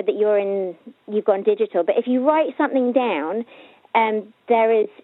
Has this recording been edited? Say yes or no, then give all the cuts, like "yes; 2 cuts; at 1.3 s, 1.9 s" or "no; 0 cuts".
no; 0 cuts